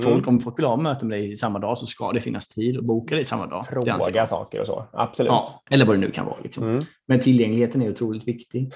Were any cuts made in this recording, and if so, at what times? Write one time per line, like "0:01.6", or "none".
0:05.7